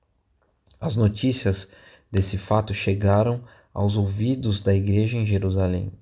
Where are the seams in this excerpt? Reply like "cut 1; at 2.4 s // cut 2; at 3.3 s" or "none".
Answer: none